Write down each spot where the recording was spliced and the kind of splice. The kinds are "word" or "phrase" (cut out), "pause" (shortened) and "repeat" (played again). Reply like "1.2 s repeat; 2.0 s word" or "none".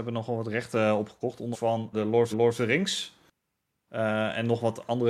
1.5 s word; 1.9 s word; 2.3 s repeat